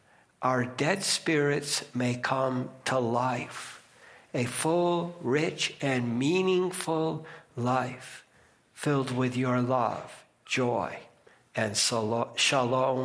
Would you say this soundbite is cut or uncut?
uncut